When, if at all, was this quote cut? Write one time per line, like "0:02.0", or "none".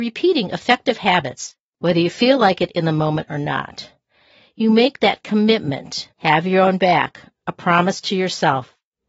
0:06.1